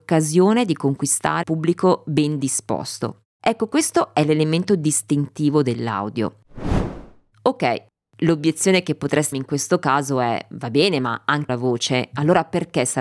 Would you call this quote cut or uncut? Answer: cut